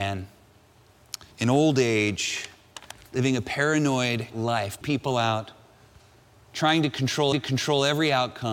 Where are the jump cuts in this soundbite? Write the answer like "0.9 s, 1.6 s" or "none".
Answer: 1.3 s, 4.3 s, 4.8 s, 7.3 s